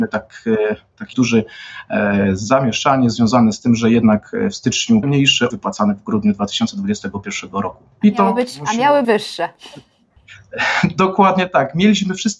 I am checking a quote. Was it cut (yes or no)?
yes